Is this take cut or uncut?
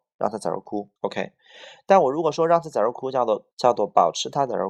cut